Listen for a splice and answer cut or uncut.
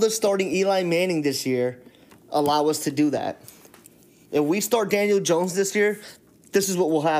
uncut